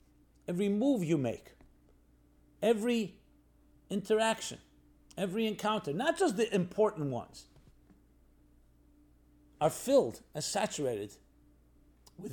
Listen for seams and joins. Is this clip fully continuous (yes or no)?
yes